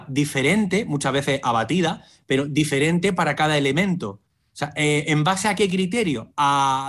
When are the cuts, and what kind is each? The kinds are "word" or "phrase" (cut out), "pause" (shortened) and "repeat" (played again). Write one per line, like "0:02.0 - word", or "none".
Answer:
none